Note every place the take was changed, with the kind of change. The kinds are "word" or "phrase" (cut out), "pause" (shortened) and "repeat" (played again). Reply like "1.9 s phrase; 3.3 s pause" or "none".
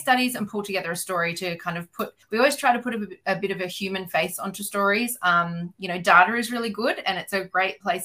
2.2 s pause